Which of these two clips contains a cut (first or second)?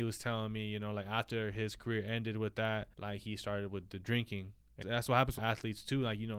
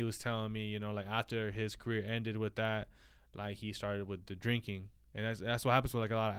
first